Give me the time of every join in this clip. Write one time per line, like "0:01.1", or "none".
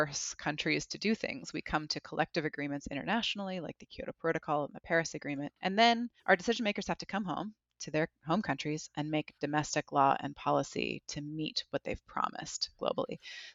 0:05.6
0:06.2